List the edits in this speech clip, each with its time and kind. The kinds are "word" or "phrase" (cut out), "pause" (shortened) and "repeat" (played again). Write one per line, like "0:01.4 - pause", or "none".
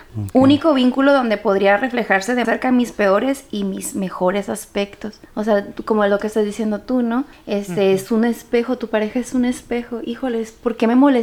0:02.4 - word